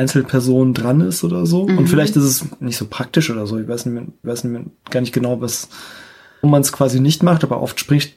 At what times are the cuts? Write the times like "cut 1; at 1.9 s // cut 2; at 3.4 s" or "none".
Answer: cut 1; at 4.2 s // cut 2; at 6.4 s